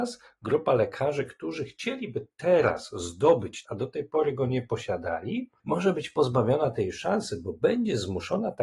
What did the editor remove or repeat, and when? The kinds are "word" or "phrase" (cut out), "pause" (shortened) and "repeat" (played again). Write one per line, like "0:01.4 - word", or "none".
0:03.6 - phrase